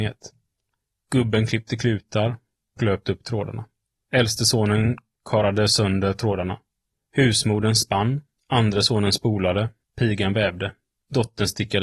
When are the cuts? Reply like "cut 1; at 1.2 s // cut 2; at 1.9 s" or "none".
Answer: cut 1; at 2.8 s